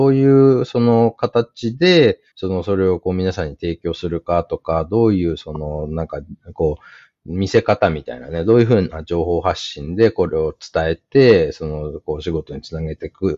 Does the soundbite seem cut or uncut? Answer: cut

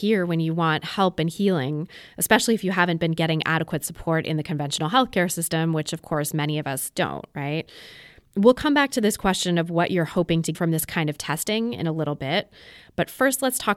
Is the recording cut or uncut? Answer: cut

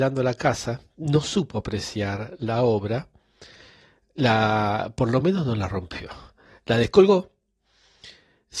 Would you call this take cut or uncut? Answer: uncut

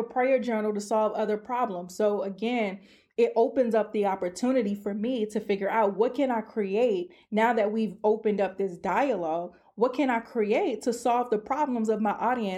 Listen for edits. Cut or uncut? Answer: uncut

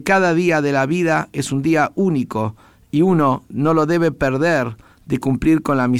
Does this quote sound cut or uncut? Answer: uncut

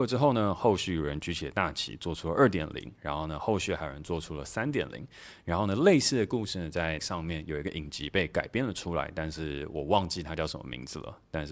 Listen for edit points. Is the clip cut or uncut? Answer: cut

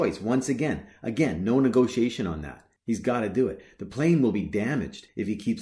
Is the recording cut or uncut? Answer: uncut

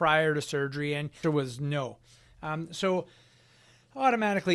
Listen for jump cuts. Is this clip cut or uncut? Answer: cut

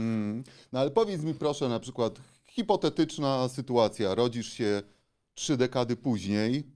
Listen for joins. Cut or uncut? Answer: uncut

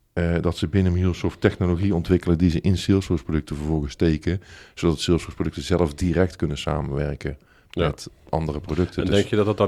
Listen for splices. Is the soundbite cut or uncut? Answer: uncut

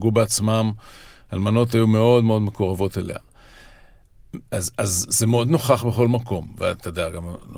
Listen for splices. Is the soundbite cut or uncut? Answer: uncut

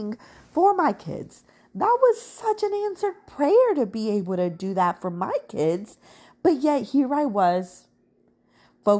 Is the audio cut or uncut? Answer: uncut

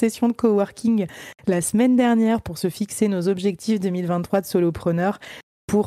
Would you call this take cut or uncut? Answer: uncut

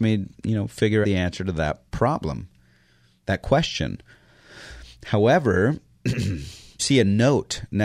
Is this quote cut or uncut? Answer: cut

